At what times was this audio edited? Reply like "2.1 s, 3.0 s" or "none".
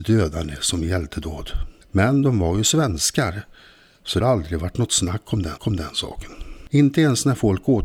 4.2 s, 5.6 s

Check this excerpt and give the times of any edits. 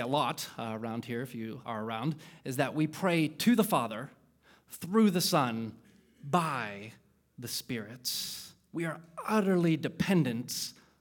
1.6 s

